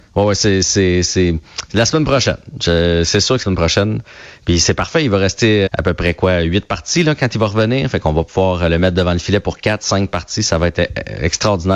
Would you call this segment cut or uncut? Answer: cut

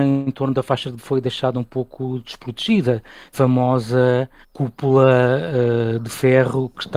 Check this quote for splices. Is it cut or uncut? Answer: cut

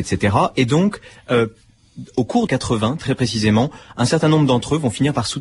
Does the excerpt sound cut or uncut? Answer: cut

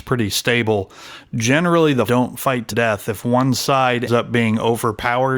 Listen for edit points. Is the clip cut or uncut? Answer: cut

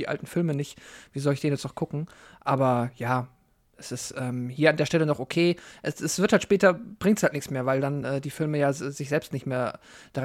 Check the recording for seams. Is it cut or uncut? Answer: uncut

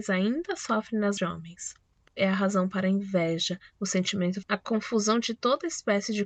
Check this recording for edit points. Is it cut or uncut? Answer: cut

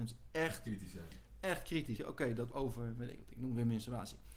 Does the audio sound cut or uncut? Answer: cut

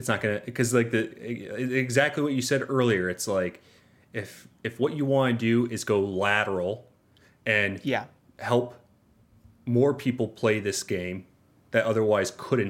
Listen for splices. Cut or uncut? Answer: uncut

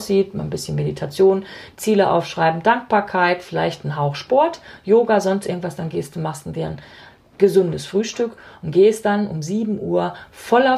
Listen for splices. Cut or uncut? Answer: uncut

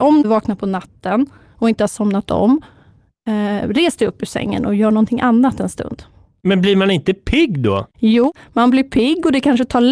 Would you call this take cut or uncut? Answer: uncut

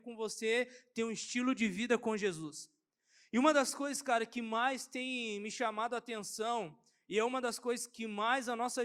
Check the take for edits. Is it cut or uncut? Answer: uncut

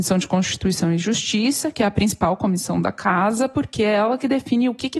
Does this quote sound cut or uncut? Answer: uncut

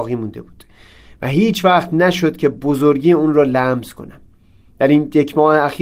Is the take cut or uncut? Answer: uncut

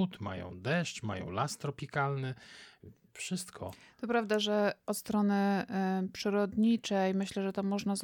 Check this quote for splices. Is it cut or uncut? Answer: uncut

